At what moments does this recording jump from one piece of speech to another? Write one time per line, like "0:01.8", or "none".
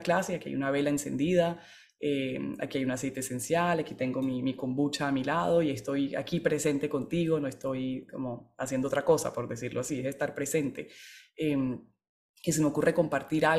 none